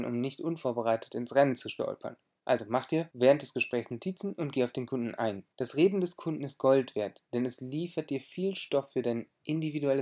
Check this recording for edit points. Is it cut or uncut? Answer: cut